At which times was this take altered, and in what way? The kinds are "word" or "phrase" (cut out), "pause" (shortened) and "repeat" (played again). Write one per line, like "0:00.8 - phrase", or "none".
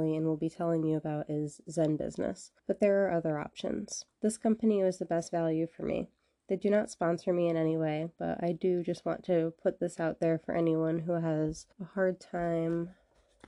0:02.6 - pause
0:04.1 - pause
0:11.7 - pause